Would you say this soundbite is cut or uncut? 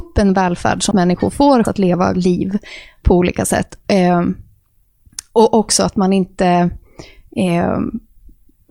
cut